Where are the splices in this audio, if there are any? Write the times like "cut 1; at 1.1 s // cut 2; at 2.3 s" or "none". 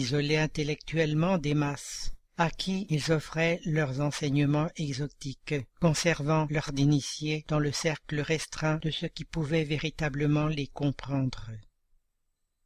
cut 1; at 2.3 s // cut 2; at 5.7 s // cut 3; at 6.7 s